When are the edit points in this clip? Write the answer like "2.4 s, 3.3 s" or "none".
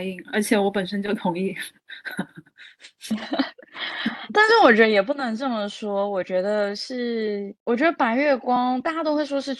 7.6 s